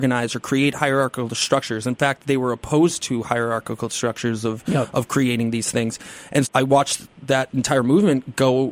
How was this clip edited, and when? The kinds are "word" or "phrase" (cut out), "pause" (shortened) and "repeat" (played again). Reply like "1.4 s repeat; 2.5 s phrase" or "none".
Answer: 6.4 s word